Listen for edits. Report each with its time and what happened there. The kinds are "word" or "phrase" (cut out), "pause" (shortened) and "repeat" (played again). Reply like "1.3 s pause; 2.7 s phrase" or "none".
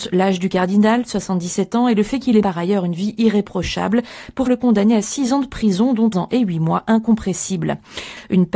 2.4 s word; 4.5 s word; 6.1 s word